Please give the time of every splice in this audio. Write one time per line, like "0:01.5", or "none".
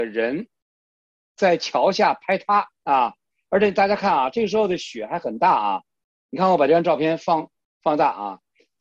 none